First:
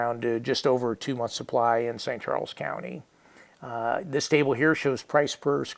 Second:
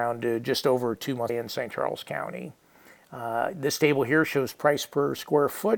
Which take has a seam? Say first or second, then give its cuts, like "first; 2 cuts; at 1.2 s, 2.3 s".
second; 1 cut; at 1.3 s